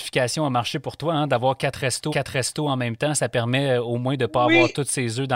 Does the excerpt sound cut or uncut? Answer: cut